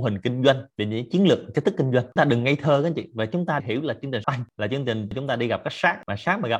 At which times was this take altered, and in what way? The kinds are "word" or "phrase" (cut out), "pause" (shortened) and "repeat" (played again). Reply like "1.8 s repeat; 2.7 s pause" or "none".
2.2 s word; 3.6 s word; 4.2 s word